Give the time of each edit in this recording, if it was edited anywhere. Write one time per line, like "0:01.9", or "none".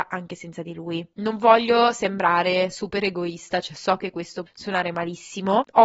0:04.5

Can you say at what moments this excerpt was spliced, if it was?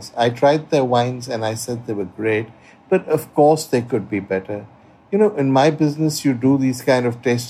none

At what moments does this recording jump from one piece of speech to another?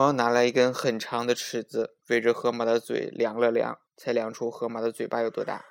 0:02.0
0:03.9

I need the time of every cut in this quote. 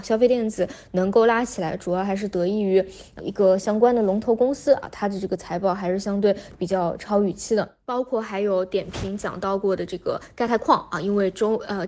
0:03.2

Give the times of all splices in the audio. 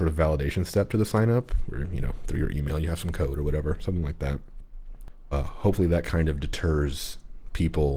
0:05.3

